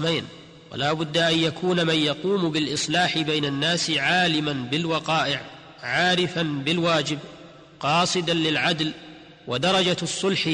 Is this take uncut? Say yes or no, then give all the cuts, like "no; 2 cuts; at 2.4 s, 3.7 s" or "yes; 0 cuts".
yes; 0 cuts